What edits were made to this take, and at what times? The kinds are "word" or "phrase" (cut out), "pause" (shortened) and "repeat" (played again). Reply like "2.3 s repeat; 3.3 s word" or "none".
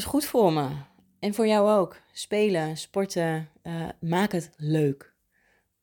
none

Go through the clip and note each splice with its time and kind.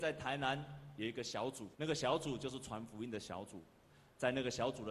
1.7 s pause

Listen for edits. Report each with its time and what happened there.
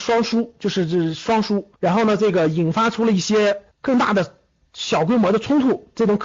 1.8 s pause; 3.7 s pause

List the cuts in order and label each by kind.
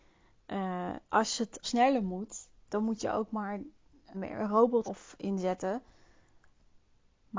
1.1 s pause; 1.6 s word; 4.1 s word; 4.8 s word

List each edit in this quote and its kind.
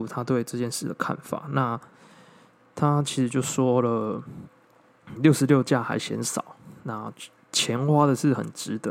5.2 s word

